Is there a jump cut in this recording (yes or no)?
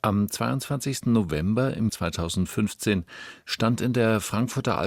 yes